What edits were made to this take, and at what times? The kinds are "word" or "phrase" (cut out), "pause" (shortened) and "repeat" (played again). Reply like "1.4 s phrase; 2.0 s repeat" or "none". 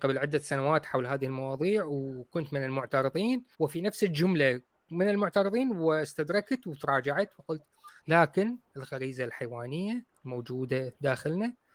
3.5 s pause; 8.0 s pause

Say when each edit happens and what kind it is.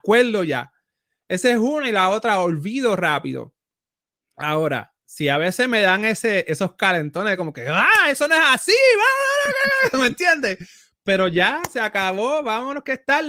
none

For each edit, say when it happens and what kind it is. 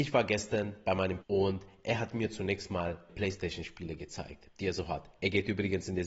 1.2 s word; 3.1 s word

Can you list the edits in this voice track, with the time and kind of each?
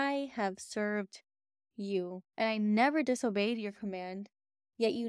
2.3 s pause

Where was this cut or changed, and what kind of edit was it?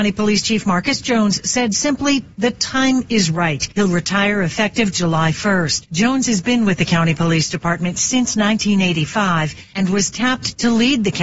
none

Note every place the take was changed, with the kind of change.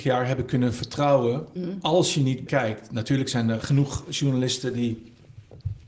1.6 s word; 2.5 s word; 3.6 s word

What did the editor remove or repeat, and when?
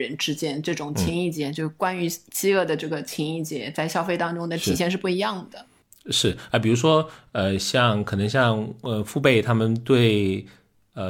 none

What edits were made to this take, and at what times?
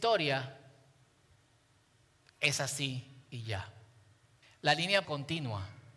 4.4 s pause; 5.0 s word

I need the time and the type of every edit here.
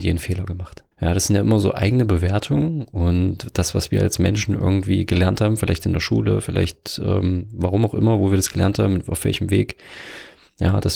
0.9 s pause

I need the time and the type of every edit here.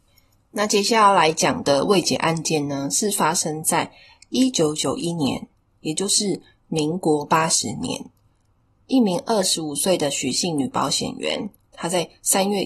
none

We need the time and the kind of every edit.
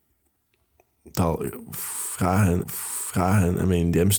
2.6 s repeat

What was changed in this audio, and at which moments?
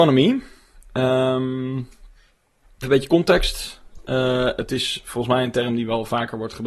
2.8 s word

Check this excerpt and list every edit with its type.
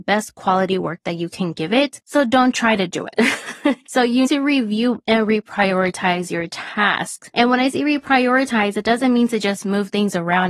4.2 s word

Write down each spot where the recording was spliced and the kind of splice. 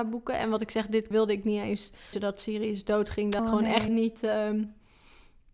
1.1 s word; 2.1 s word; 3.4 s word; 3.9 s word

